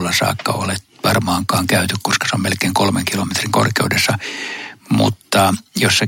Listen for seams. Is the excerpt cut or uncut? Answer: uncut